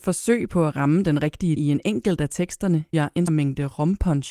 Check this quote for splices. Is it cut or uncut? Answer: cut